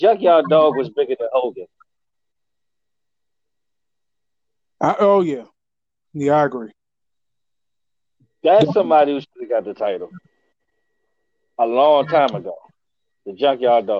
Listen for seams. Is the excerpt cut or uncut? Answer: uncut